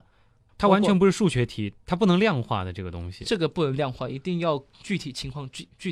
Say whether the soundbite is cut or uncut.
cut